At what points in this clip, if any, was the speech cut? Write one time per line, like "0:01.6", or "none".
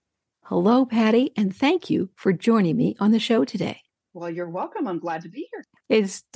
0:03.9